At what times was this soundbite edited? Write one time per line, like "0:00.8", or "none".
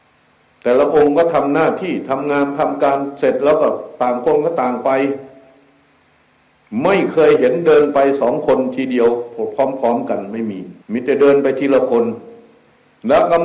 0:10.8